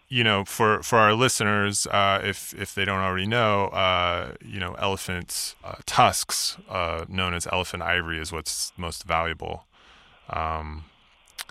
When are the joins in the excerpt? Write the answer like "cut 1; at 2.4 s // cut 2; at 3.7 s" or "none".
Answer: none